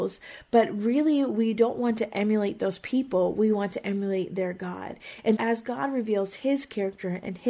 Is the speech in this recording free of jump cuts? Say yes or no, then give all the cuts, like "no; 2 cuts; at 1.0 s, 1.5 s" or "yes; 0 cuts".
no; 1 cut; at 5.4 s